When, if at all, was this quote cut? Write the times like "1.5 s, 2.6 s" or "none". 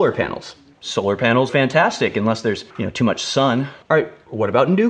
1.5 s, 2.7 s, 3.8 s